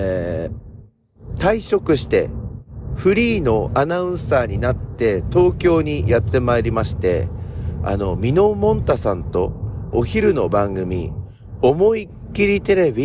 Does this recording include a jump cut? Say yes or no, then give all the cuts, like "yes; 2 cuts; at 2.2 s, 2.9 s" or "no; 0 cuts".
yes; 1 cut; at 9.9 s